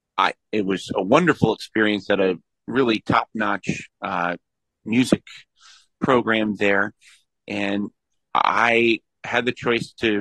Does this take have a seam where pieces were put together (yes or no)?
no